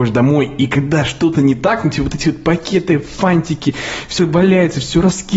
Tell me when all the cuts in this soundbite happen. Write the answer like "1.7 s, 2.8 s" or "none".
4.2 s